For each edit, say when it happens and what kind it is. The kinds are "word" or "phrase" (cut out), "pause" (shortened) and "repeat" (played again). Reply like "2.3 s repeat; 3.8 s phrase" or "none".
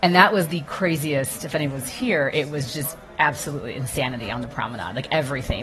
none